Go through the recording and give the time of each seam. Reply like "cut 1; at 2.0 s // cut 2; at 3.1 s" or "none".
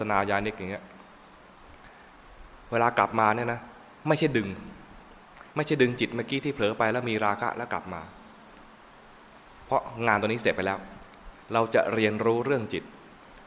cut 1; at 5.5 s // cut 2; at 11.4 s